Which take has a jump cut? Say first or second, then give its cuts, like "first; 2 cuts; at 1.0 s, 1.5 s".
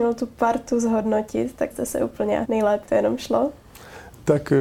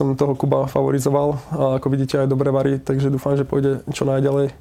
first; 3 cuts; at 1.7 s, 2.4 s, 2.8 s